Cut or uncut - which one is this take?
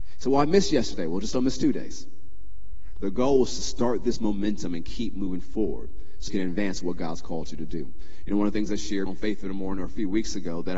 cut